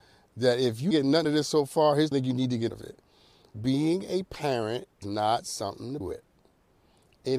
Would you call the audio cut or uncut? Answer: cut